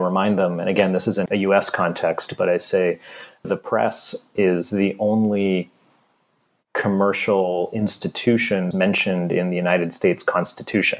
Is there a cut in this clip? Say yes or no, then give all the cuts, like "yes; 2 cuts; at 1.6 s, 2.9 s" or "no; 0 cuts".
yes; 3 cuts; at 1.3 s, 3.4 s, 8.7 s